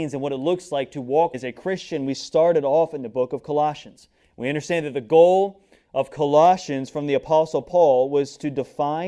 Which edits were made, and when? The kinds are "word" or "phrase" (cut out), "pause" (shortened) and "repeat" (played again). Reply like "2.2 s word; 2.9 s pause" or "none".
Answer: 1.3 s word; 4.2 s pause